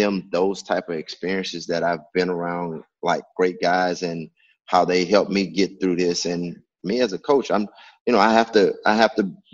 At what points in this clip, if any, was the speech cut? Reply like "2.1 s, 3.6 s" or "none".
none